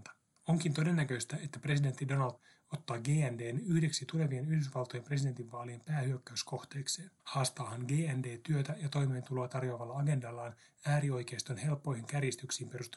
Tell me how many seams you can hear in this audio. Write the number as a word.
two